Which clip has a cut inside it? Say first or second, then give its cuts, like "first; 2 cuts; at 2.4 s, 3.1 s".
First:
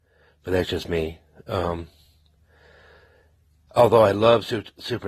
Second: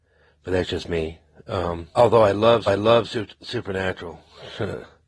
second; 2 cuts; at 1.9 s, 2.7 s